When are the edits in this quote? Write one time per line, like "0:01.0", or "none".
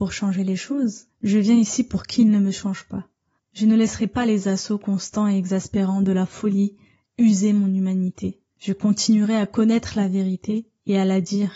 0:01.1
0:03.4
0:08.5